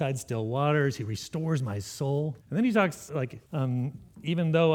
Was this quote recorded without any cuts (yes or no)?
no